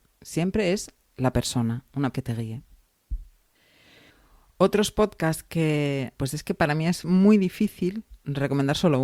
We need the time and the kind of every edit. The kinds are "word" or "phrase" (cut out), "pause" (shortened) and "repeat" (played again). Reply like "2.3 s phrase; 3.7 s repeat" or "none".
2.1 s word; 3.5 s pause; 6.1 s word